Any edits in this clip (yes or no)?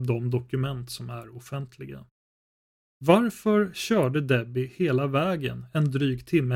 no